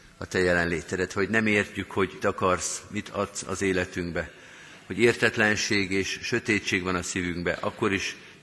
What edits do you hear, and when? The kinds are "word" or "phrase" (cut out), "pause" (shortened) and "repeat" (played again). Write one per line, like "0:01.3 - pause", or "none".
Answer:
0:02.2 - word